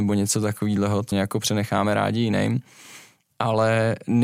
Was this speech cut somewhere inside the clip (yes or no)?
yes